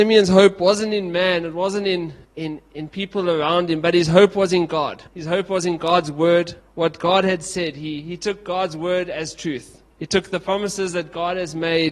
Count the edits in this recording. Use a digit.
4